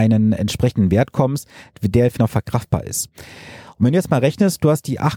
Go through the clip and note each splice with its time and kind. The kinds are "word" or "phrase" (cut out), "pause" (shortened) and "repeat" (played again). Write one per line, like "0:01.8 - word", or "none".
0:02.2 - word